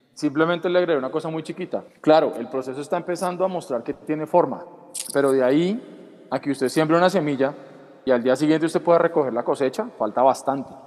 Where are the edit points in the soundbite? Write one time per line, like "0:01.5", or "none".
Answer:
0:01.9